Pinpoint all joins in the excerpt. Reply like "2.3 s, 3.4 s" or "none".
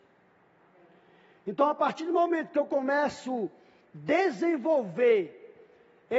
none